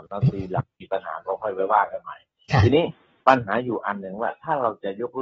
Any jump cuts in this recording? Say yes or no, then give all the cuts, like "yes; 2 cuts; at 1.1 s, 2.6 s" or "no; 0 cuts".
no; 0 cuts